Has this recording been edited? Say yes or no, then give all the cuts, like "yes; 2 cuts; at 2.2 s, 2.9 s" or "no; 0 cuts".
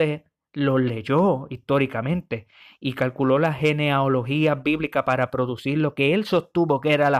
no; 0 cuts